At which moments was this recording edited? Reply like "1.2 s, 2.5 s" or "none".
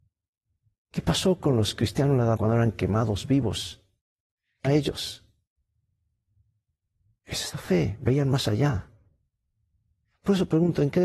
2.4 s, 4.6 s

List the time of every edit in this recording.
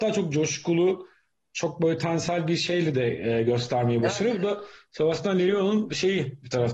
none

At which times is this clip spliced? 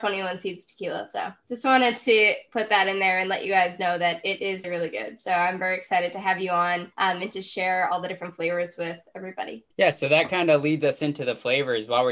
4.6 s, 6.9 s, 9.7 s

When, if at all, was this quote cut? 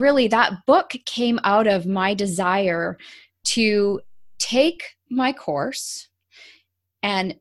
none

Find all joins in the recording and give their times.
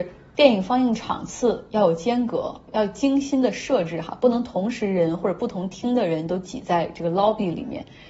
none

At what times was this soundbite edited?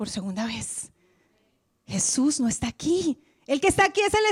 none

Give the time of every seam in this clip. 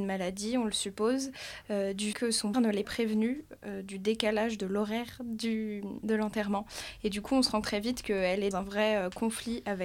2.1 s, 2.5 s, 2.8 s, 7.6 s, 8.5 s

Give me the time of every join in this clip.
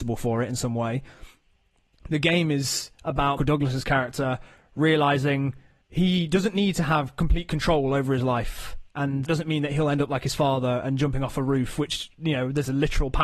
3.4 s, 5.8 s, 9.3 s

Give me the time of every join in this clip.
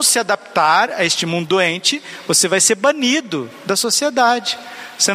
none

